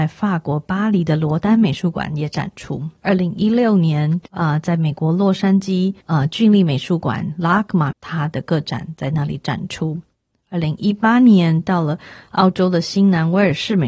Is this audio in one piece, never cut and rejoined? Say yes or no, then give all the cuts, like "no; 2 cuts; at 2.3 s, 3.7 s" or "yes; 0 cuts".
no; 3 cuts; at 3.0 s, 4.3 s, 7.9 s